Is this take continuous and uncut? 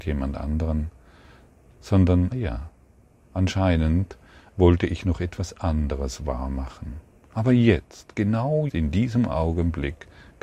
no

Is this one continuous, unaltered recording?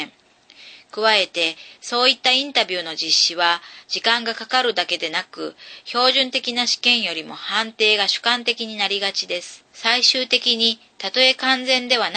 no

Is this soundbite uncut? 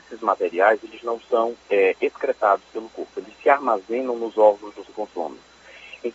no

